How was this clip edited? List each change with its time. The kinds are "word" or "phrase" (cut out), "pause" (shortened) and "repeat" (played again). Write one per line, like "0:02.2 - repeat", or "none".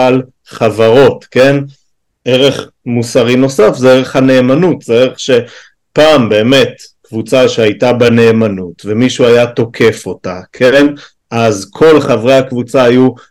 none